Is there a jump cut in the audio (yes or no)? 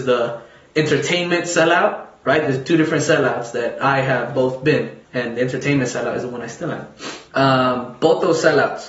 yes